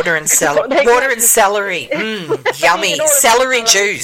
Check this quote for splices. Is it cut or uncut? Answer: uncut